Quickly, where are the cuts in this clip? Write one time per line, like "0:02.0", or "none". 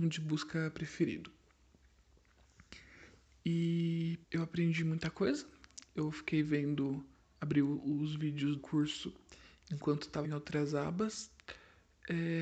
0:04.2
0:07.1
0:08.6
0:10.2